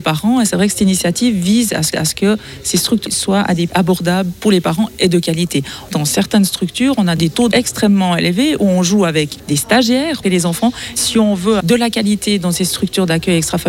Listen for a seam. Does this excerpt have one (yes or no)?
yes